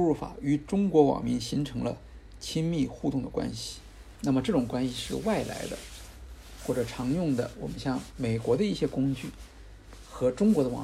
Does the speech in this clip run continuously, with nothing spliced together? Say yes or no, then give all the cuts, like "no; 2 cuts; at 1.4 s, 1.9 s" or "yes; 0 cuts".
no; 1 cut; at 4.1 s